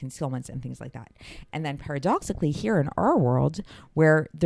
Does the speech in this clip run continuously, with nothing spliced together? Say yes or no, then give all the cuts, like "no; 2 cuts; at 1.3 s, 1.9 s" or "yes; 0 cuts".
yes; 0 cuts